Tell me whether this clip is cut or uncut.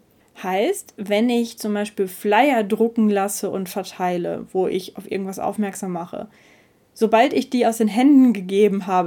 uncut